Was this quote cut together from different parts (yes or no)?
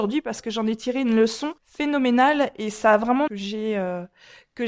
yes